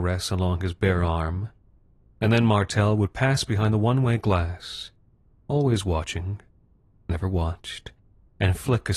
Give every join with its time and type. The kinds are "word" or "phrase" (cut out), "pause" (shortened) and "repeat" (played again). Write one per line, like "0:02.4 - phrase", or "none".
none